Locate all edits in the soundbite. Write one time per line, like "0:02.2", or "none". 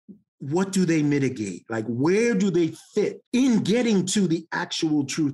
0:03.3